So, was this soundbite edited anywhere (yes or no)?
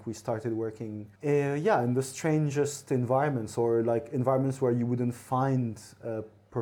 yes